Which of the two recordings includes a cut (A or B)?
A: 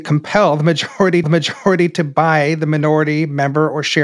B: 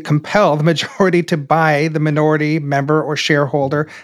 A